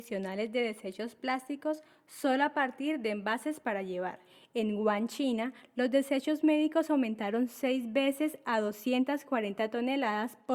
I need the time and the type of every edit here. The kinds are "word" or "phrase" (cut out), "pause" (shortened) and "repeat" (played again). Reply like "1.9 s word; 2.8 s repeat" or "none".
none